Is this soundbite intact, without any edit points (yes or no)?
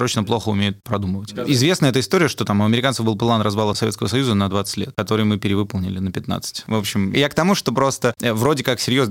yes